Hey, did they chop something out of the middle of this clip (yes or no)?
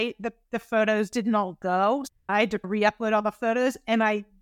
no